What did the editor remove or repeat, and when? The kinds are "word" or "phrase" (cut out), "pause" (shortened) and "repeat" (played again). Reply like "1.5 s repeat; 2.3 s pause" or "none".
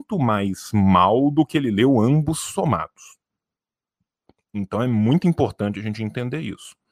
none